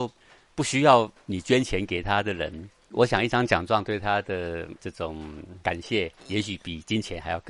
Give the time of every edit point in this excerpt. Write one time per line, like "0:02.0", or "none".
0:04.8
0:06.2